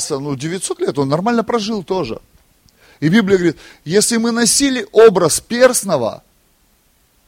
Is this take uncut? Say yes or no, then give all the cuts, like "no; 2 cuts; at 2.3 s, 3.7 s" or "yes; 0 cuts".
yes; 0 cuts